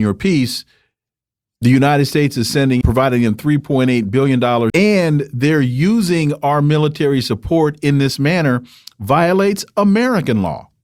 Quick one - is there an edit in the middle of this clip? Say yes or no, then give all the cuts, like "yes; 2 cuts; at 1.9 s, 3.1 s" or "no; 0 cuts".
yes; 2 cuts; at 2.8 s, 4.7 s